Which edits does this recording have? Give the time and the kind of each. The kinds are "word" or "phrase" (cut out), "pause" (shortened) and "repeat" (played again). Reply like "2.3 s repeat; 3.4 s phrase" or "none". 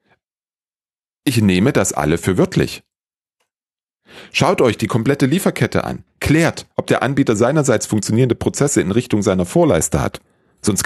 6.7 s pause